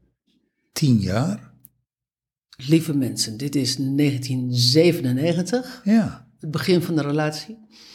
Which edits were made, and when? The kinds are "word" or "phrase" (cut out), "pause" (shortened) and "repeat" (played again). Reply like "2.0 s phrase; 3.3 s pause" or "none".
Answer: none